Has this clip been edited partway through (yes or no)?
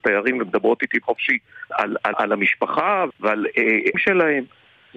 yes